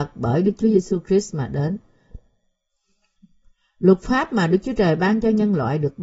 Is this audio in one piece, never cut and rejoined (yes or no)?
yes